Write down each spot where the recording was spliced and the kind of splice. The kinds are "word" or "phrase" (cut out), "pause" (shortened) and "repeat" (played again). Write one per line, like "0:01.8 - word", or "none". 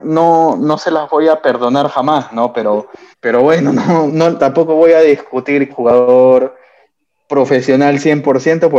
0:03.1 - pause
0:04.1 - word
0:05.7 - phrase